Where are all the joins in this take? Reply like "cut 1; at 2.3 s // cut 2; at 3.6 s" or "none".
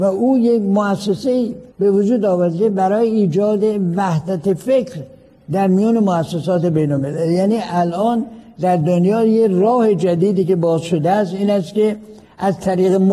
cut 1; at 1.7 s